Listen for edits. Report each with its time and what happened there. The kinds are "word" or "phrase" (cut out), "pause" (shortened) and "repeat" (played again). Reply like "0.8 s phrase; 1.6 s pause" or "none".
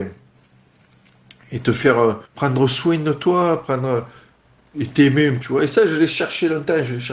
2.3 s pause; 5.4 s word